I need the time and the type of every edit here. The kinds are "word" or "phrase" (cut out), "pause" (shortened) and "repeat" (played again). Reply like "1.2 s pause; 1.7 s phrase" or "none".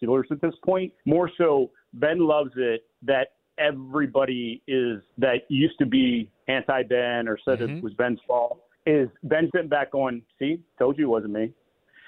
1.0 s pause; 2.9 s pause; 5.1 s pause; 8.7 s pause; 9.5 s word